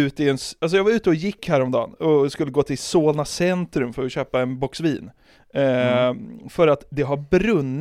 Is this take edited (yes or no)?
no